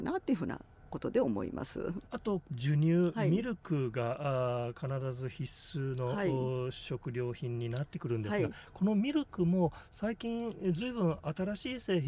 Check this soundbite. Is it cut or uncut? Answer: cut